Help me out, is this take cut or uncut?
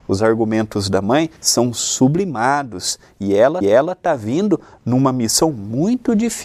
cut